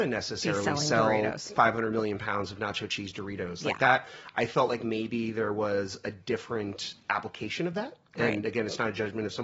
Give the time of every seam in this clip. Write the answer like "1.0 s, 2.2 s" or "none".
none